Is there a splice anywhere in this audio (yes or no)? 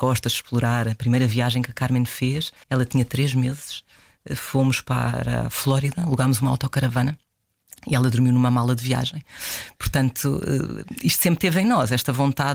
yes